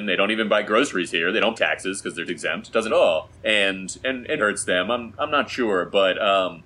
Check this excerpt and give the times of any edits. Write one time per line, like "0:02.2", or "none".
0:01.6
0:02.3
0:02.9
0:03.3
0:04.4